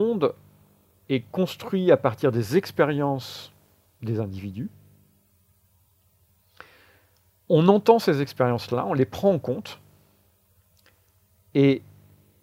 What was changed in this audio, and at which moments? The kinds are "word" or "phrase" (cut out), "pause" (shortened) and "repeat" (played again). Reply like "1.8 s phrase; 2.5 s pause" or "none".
none